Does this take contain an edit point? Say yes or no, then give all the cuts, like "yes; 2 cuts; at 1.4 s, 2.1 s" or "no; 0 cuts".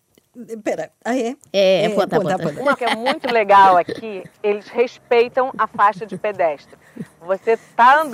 yes; 1 cut; at 2.8 s